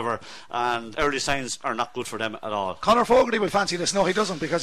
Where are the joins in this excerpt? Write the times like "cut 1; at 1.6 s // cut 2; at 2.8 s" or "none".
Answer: cut 1; at 0.9 s

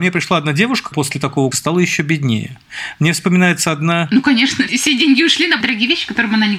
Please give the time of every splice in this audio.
cut 1; at 0.9 s // cut 2; at 1.5 s // cut 3; at 4.7 s // cut 4; at 5.6 s

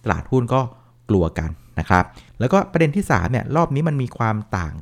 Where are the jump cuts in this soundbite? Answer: cut 1; at 2.3 s

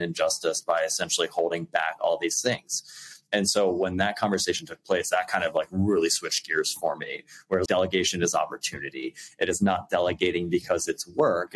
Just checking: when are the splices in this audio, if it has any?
cut 1; at 7.7 s

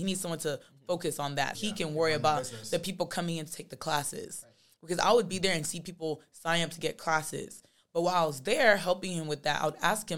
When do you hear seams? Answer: cut 1; at 1.5 s

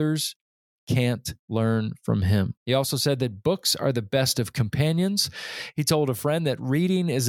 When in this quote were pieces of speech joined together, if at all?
cut 1; at 1.4 s // cut 2; at 2.6 s

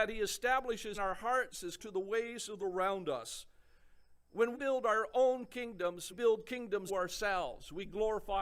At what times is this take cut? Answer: cut 1; at 0.9 s // cut 2; at 1.8 s // cut 3; at 2.6 s // cut 4; at 4.5 s // cut 5; at 6.1 s // cut 6; at 6.9 s

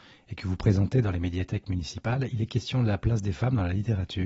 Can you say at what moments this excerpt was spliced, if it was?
none

